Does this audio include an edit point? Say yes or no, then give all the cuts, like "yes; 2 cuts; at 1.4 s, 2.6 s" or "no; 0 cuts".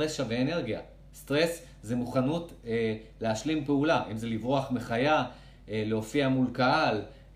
no; 0 cuts